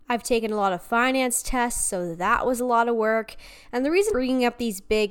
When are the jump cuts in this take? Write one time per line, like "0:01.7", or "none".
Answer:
0:04.1